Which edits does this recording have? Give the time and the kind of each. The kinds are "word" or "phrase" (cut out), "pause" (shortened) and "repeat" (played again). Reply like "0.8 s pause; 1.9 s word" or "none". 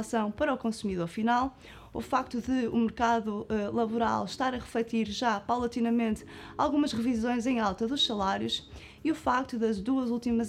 none